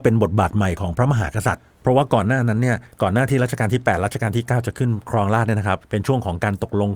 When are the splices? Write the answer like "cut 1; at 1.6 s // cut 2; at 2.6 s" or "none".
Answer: cut 1; at 2.9 s // cut 2; at 5.8 s